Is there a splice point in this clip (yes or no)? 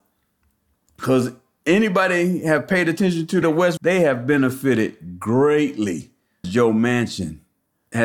yes